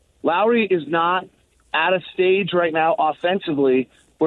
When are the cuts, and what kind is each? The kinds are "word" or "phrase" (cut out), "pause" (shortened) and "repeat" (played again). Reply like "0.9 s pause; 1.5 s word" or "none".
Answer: none

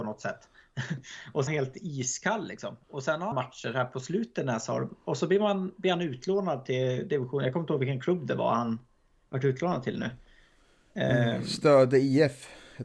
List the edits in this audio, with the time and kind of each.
1.5 s phrase; 2.8 s pause; 3.3 s phrase

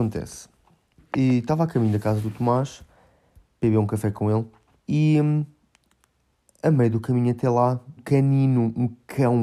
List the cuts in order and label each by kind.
4.7 s pause; 8.0 s word

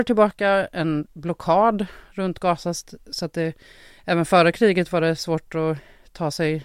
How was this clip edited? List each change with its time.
none

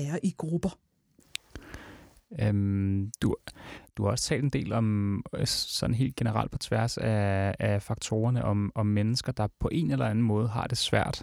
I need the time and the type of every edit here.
none

